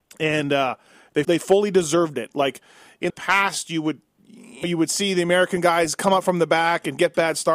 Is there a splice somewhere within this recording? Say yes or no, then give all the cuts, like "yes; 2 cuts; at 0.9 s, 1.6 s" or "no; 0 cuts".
yes; 3 cuts; at 1.2 s, 3.1 s, 4.6 s